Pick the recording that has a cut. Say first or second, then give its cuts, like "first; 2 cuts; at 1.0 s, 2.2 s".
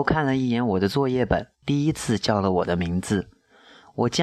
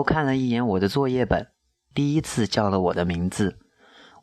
first; 1 cut; at 1.6 s